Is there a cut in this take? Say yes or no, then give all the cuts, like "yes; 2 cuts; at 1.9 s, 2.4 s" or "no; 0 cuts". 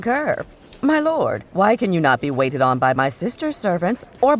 yes; 1 cut; at 1.5 s